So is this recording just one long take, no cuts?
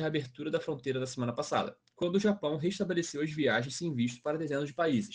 yes; 0 cuts

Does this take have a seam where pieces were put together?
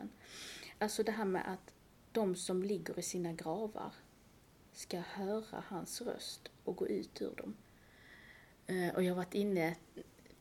no; 0 cuts

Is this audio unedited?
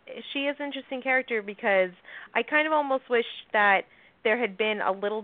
yes; 0 cuts

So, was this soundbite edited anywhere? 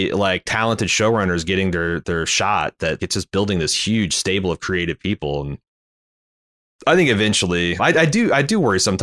yes; 3 cuts; at 2.0 s, 3.0 s, 7.8 s

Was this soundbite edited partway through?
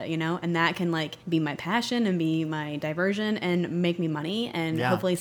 yes; 1 cut; at 1.2 s

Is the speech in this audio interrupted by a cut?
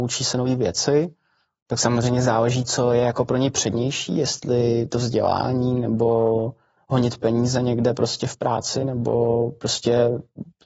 no; 0 cuts

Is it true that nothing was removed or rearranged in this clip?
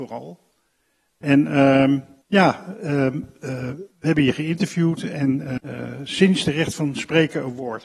no; 3 cuts; at 2.2 s, 3.9 s, 5.6 s

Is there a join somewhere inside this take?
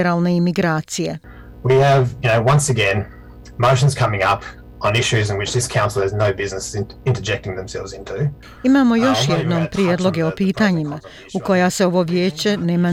no; 0 cuts

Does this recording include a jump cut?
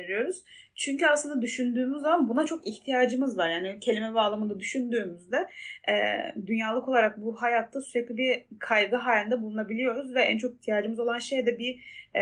no; 0 cuts

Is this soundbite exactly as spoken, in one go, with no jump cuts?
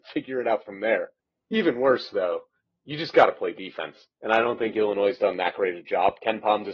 no; 1 cut; at 1.2 s

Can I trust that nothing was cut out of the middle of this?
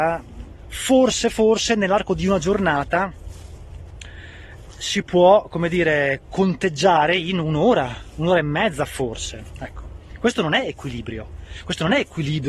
yes; 0 cuts

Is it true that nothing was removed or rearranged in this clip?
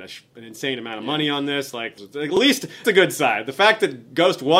no; 2 cuts; at 2.0 s, 2.8 s

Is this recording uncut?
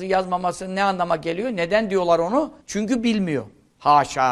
no; 1 cut; at 2.6 s

